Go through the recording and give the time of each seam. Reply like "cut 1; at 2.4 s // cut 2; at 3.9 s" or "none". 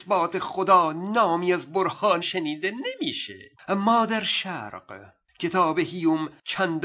cut 1; at 2.2 s // cut 2; at 3.5 s